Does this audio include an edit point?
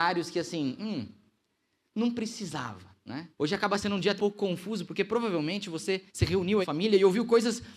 yes; 4 cuts; at 3.3 s, 4.2 s, 6.1 s, 6.6 s

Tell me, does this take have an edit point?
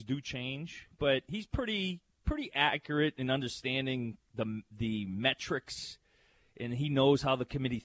no; 0 cuts

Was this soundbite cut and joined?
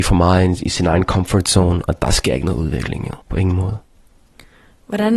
yes; 1 cut; at 3.2 s

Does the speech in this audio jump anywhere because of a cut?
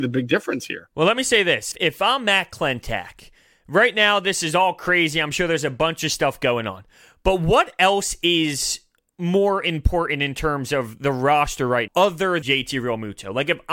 yes; 3 cuts; at 1.7 s, 11.9 s, 12.4 s

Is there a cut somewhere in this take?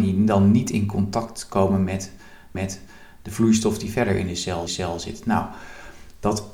yes; 2 cuts; at 2.5 s, 4.7 s

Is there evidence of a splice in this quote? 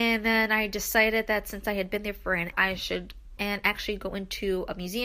yes; 2 cuts; at 2.5 s, 3.4 s

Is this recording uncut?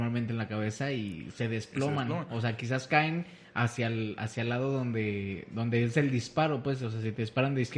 yes; 0 cuts

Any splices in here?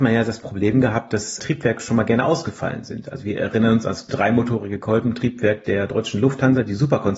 yes; 2 cuts; at 1.4 s, 4.1 s

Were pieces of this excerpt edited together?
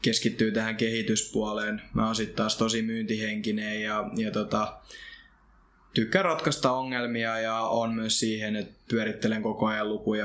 no; 0 cuts

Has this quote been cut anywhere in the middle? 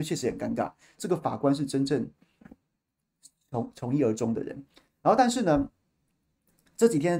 no; 0 cuts

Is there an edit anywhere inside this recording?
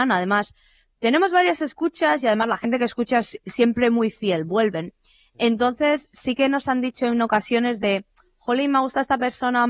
no; 0 cuts

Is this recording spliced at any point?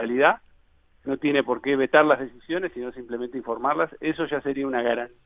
no; 0 cuts

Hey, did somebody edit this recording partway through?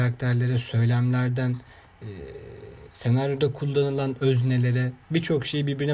yes; 2 cuts; at 2.9 s, 5.0 s

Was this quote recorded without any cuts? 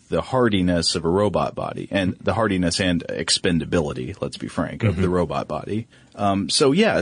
no; 1 cut; at 5.9 s

